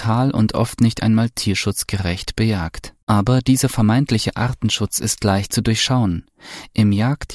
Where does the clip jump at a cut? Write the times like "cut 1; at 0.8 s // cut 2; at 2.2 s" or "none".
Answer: cut 1; at 3.0 s

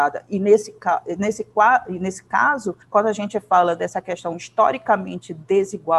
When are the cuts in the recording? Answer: cut 1; at 2.8 s

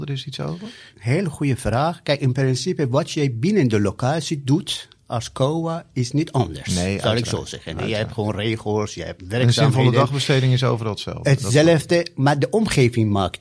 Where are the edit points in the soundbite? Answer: none

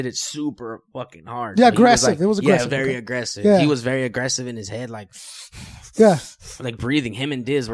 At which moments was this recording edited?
none

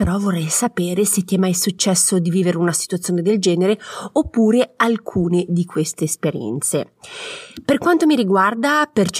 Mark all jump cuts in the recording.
none

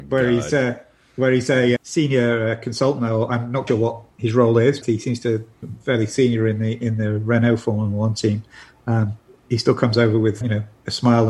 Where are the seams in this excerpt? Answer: cut 1; at 1.8 s // cut 2; at 3.7 s // cut 3; at 4.8 s // cut 4; at 9.5 s // cut 5; at 10.4 s

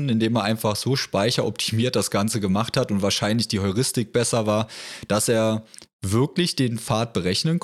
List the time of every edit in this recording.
none

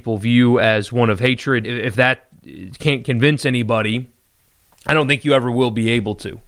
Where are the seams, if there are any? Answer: cut 1; at 1.6 s

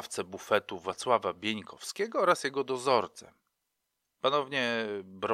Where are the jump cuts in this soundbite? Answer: none

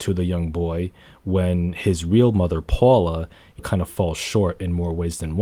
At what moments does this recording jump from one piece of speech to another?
cut 1; at 3.6 s

